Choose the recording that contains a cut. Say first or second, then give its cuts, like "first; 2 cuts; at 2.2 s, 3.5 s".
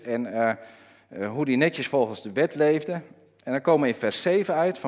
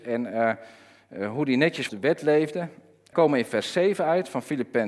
second; 2 cuts; at 1.9 s, 3.1 s